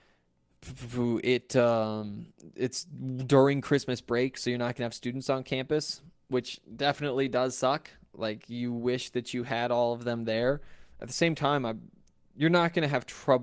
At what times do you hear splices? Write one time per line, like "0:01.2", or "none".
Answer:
none